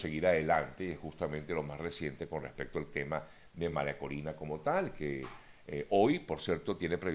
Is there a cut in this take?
no; 0 cuts

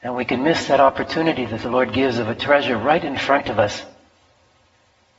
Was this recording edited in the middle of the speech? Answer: no; 0 cuts

